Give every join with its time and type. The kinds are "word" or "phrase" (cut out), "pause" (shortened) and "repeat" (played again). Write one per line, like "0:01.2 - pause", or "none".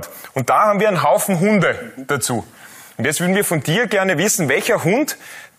none